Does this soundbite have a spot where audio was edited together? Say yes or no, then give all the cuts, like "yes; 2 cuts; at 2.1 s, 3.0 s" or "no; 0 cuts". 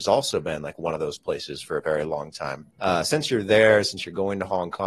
yes; 1 cut; at 2.7 s